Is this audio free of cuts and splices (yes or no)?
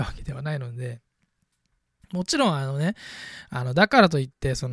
yes